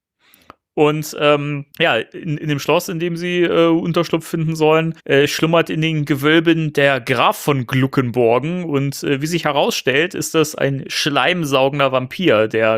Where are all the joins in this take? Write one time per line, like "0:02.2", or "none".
0:01.7
0:05.0